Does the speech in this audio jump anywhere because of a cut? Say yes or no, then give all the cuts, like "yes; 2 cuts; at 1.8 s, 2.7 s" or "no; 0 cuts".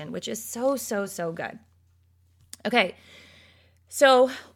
no; 0 cuts